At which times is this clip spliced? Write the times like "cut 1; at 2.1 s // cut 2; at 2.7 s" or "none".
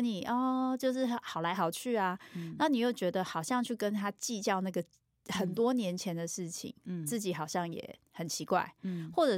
none

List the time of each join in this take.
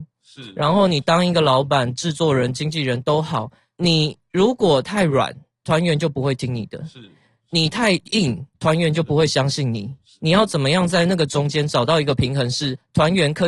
none

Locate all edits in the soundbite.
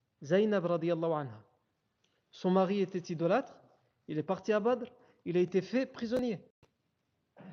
none

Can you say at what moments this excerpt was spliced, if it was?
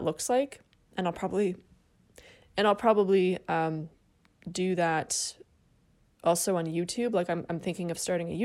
none

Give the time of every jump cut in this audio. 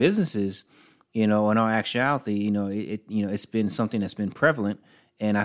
none

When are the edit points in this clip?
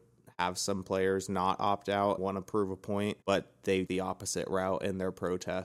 cut 1; at 2.2 s // cut 2; at 3.2 s // cut 3; at 3.9 s

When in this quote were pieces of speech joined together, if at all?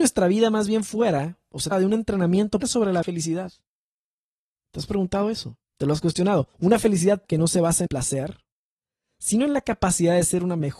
cut 1; at 1.7 s // cut 2; at 2.6 s // cut 3; at 3.0 s // cut 4; at 5.7 s // cut 5; at 6.5 s // cut 6; at 7.2 s // cut 7; at 7.9 s

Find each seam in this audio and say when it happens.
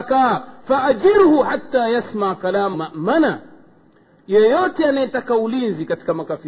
cut 1; at 2.7 s

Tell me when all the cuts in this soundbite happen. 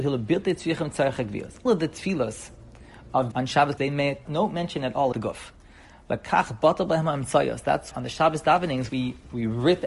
cut 1; at 1.7 s // cut 2; at 3.3 s // cut 3; at 3.8 s // cut 4; at 4.3 s // cut 5; at 5.1 s // cut 6; at 7.9 s // cut 7; at 8.9 s

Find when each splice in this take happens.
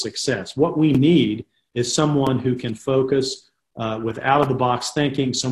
none

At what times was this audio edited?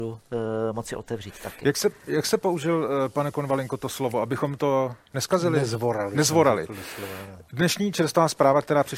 none

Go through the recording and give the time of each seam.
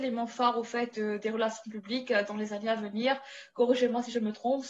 cut 1; at 0.9 s

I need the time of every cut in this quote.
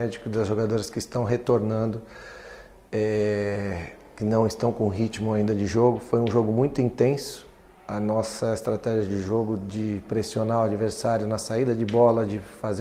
none

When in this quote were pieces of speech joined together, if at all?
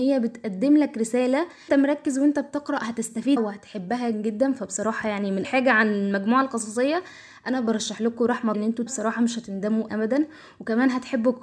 cut 1; at 1.7 s // cut 2; at 3.4 s // cut 3; at 4.1 s // cut 4; at 5.4 s // cut 5; at 8.5 s // cut 6; at 8.9 s // cut 7; at 9.9 s

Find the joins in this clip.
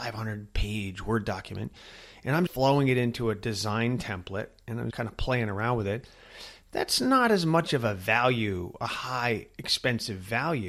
cut 1; at 2.5 s // cut 2; at 4.9 s

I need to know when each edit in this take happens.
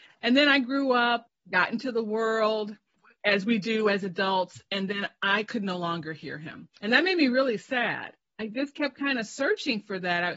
cut 1; at 6.8 s

